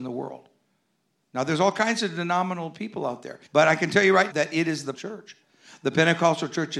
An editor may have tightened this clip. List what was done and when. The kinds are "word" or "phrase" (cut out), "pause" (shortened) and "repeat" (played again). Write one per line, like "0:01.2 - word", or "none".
0:03.5 - pause
0:04.3 - word
0:04.9 - word